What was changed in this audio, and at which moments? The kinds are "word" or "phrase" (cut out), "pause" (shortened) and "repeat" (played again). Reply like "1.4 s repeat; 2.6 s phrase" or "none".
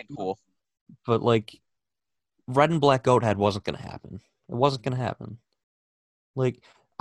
none